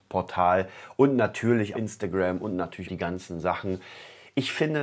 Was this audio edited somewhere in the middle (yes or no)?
yes